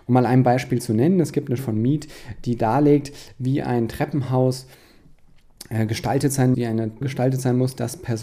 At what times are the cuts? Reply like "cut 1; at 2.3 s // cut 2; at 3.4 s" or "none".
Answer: cut 1; at 1.6 s // cut 2; at 6.5 s // cut 3; at 7.0 s